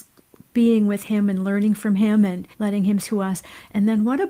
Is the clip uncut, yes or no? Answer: no